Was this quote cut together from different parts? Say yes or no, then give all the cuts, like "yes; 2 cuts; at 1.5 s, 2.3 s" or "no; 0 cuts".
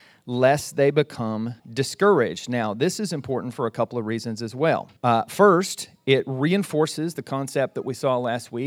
yes; 2 cuts; at 1.6 s, 5.0 s